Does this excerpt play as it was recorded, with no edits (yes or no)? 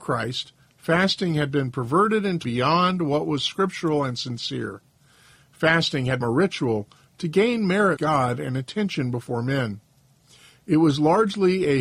no